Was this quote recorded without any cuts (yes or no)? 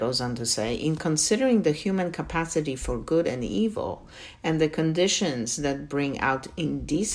yes